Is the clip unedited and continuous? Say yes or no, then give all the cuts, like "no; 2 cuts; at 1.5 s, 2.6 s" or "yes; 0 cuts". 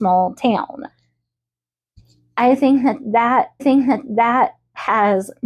no; 1 cut; at 3.6 s